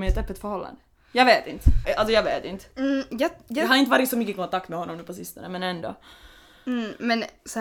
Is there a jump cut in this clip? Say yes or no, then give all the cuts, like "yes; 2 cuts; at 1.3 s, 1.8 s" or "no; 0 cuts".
yes; 1 cut; at 1.8 s